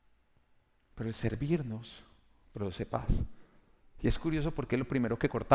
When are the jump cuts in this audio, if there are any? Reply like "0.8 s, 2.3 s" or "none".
none